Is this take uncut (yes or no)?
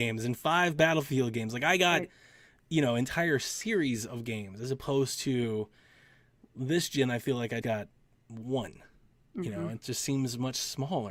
no